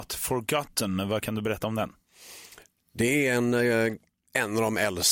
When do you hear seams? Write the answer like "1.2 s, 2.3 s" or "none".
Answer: none